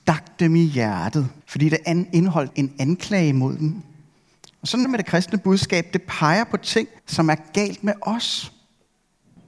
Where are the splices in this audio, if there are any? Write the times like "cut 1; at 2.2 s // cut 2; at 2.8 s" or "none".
cut 1; at 1.4 s // cut 2; at 2.5 s // cut 3; at 4.8 s // cut 4; at 7.0 s